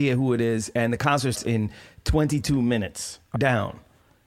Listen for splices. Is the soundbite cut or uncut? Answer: cut